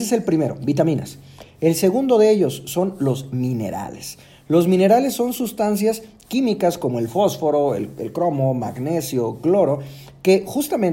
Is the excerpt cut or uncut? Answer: uncut